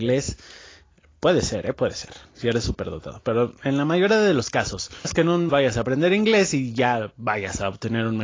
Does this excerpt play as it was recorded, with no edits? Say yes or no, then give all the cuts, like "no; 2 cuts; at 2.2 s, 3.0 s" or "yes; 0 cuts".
no; 2 cuts; at 5.0 s, 5.5 s